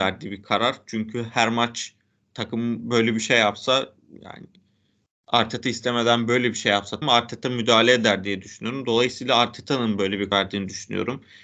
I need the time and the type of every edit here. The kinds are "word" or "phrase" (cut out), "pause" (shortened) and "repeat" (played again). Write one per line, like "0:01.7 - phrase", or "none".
0:07.0 - word
0:10.3 - word